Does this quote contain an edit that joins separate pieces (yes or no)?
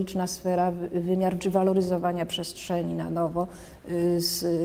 yes